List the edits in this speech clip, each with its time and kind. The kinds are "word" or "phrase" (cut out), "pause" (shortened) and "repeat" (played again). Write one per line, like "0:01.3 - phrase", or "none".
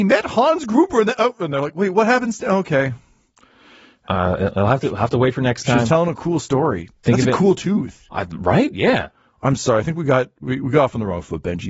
none